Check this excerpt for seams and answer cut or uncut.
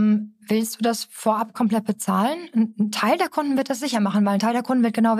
uncut